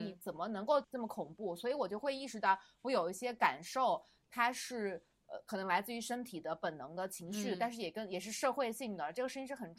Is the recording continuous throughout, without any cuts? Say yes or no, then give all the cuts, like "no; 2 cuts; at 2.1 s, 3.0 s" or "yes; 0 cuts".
yes; 0 cuts